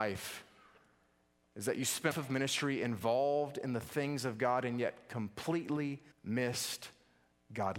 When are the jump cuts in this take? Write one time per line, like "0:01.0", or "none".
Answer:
0:02.1
0:06.1